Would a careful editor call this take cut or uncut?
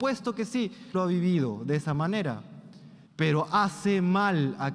cut